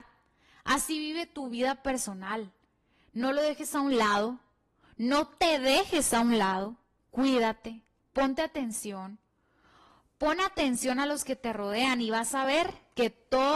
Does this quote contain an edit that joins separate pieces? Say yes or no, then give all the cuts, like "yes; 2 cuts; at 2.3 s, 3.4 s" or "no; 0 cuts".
no; 0 cuts